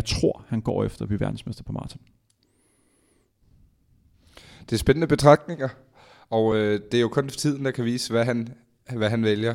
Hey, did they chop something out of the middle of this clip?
no; 0 cuts

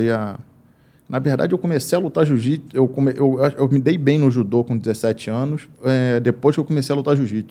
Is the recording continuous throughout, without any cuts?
no; 1 cut; at 5.7 s

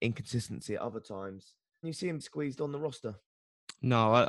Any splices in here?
yes; 2 cuts; at 1.8 s, 2.2 s

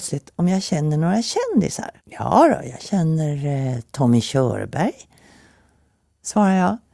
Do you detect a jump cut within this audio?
yes; 1 cut; at 2.0 s

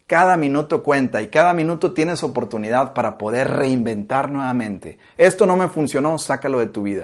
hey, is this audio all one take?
yes; 0 cuts

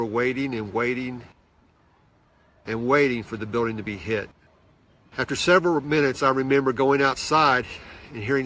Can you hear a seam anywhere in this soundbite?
no; 0 cuts

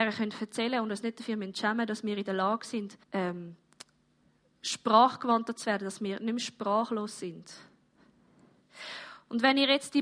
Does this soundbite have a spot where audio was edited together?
yes; 1 cut; at 3.0 s

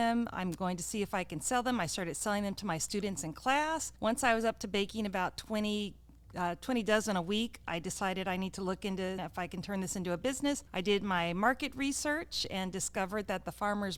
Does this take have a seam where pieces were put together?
yes; 3 cuts; at 4.0 s, 9.2 s, 10.7 s

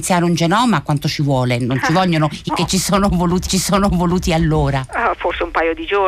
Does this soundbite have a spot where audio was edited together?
yes; 2 cuts; at 2.5 s, 3.5 s

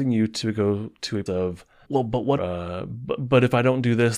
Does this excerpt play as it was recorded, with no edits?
no; 3 cuts; at 1.3 s, 1.8 s, 2.4 s

